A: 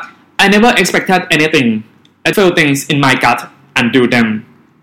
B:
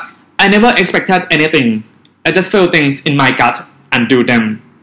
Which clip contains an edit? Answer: A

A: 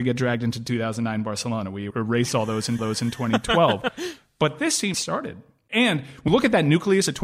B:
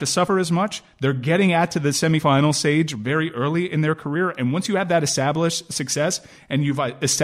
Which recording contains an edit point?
A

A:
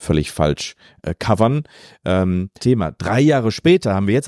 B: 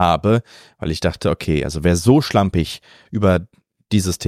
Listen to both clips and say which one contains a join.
A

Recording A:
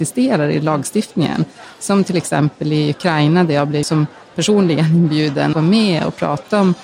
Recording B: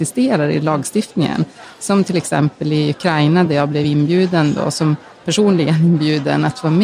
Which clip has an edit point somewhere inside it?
A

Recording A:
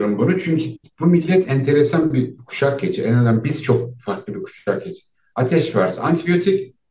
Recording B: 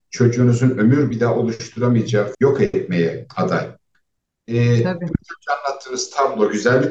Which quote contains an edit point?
B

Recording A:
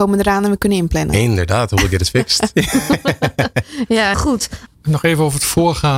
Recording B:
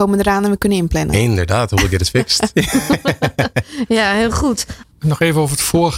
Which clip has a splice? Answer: A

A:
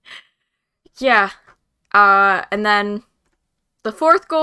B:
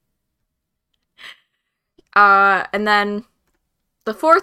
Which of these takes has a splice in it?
B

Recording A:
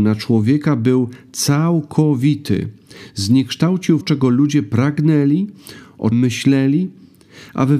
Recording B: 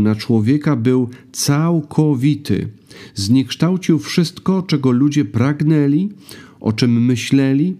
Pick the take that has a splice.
A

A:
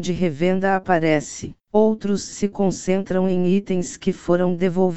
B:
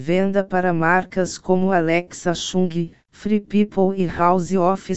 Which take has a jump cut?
A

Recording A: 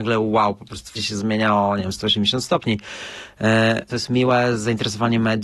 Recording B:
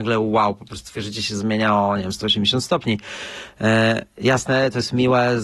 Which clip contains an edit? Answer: A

